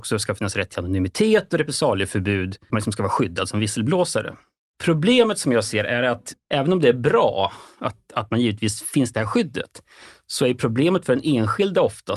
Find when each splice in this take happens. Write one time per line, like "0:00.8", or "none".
0:02.7